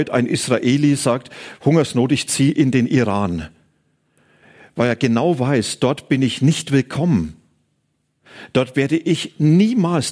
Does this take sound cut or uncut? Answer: uncut